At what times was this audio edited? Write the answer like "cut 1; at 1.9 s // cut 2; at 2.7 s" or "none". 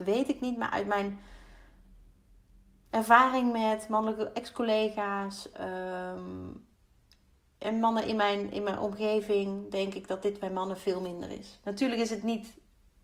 none